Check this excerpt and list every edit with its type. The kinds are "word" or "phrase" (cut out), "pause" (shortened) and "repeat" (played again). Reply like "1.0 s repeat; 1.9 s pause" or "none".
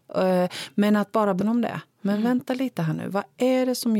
1.4 s word